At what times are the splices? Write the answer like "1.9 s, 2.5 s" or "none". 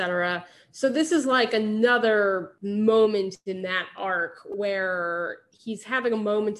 none